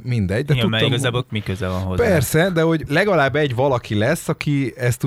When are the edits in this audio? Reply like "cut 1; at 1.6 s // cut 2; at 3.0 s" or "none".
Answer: cut 1; at 1.3 s // cut 2; at 2.9 s